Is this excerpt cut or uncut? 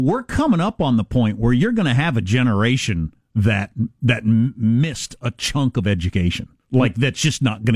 cut